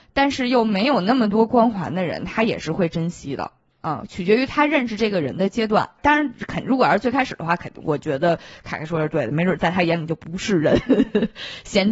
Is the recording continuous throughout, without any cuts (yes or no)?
yes